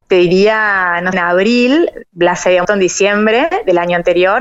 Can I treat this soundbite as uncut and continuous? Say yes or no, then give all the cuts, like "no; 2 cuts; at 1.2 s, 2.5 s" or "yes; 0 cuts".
no; 2 cuts; at 1.1 s, 2.6 s